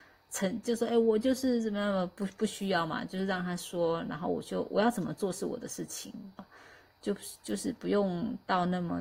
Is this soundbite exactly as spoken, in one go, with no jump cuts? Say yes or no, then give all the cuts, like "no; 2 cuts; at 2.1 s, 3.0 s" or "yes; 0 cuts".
no; 1 cut; at 6.4 s